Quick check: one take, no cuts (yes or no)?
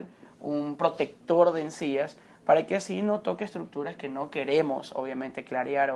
yes